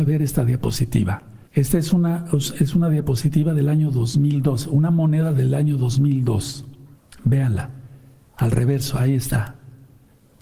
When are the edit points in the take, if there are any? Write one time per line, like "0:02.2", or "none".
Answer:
0:01.4
0:06.9